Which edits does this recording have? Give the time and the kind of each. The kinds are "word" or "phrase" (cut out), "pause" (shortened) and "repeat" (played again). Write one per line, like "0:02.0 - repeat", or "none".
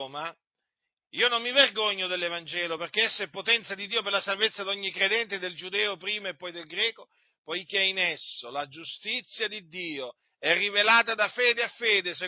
none